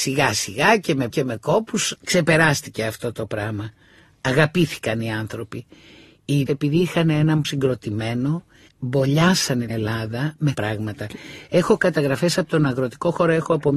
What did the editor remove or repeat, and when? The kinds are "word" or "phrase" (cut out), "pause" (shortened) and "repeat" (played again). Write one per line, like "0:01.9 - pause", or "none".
0:01.1 - word
0:06.5 - word
0:07.4 - word
0:09.7 - word
0:10.5 - word